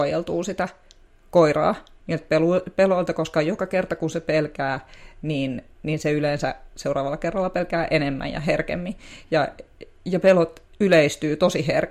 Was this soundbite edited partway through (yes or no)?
no